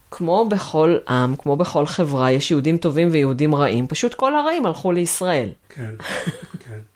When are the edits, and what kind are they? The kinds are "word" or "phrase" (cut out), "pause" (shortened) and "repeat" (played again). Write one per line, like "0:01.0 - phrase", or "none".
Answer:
none